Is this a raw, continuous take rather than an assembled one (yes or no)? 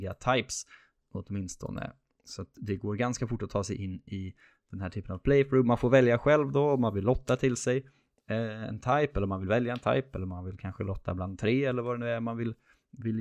yes